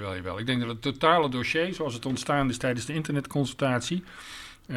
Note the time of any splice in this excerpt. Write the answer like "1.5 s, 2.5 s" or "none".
none